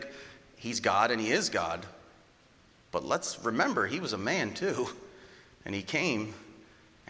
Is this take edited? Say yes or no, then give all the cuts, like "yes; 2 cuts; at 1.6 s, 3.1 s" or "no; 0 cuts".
no; 0 cuts